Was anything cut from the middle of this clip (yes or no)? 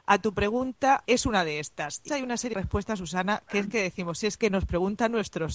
yes